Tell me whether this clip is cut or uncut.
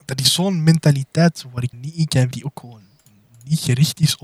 cut